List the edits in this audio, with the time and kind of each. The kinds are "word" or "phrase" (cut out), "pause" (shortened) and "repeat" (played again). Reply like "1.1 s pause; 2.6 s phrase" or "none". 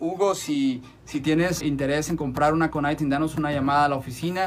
1.6 s word; 2.7 s word